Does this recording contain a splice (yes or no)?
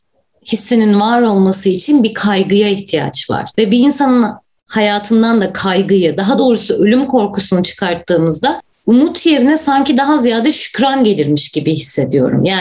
no